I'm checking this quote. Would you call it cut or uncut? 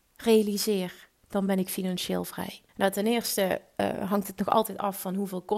cut